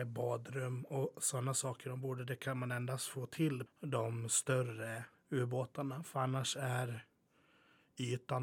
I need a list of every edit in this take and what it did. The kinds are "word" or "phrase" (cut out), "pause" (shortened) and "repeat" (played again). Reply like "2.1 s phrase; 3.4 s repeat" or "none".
3.7 s word; 5.1 s pause